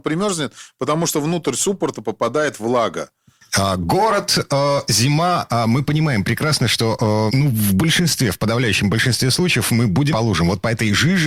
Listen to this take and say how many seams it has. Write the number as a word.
two